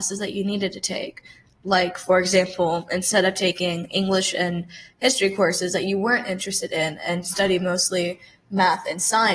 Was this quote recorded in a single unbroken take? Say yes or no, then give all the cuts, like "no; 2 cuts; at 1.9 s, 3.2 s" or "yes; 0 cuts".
yes; 0 cuts